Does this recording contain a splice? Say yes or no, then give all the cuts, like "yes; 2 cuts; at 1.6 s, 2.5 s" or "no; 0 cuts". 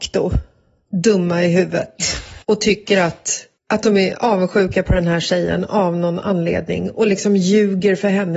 yes; 2 cuts; at 2.4 s, 3.6 s